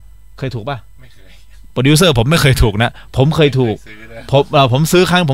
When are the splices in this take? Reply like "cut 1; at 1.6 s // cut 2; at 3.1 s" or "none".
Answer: cut 1; at 1.7 s